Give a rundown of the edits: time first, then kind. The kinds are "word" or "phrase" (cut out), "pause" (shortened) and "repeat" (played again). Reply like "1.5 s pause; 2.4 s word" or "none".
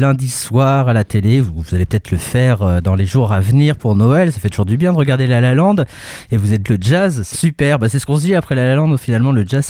6.6 s word; 7.3 s word